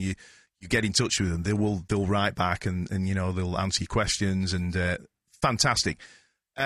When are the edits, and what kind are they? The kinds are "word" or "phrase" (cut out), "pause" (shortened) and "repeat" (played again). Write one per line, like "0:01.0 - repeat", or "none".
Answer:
none